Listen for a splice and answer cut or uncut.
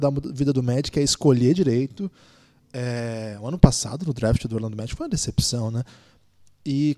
uncut